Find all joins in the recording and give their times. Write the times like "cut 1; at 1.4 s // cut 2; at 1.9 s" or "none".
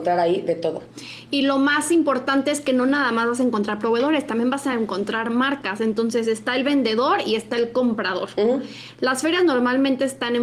none